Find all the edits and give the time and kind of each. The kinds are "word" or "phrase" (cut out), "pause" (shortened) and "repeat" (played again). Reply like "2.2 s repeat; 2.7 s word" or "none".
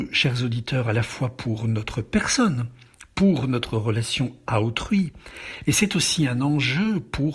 none